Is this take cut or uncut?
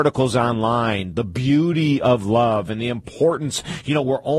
uncut